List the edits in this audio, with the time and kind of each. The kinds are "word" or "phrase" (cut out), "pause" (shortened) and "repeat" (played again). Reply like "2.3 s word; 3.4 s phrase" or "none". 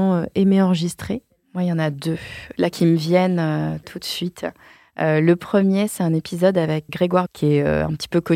6.9 s word; 7.3 s word